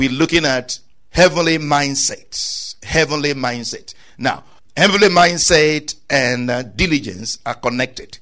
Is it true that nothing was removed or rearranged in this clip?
yes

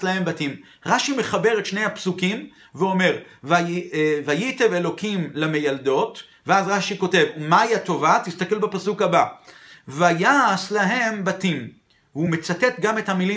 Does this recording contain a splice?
no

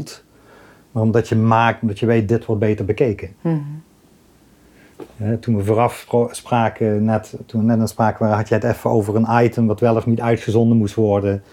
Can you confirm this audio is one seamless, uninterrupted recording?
no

